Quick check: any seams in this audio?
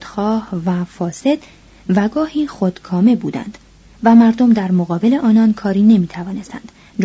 no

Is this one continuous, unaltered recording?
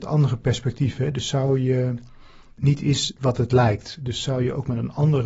yes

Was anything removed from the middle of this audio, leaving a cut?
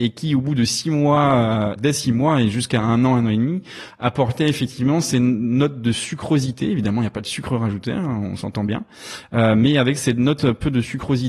yes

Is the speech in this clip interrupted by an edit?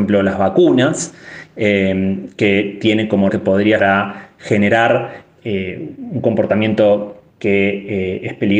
yes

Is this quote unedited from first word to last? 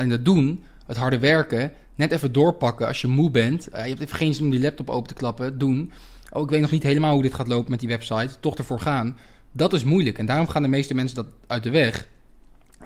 yes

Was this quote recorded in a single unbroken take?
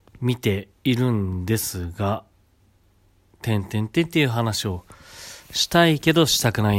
yes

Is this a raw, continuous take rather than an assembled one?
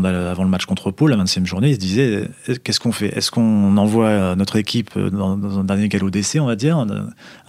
yes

